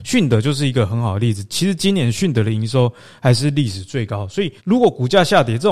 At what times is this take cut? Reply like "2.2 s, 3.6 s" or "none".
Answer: 4.6 s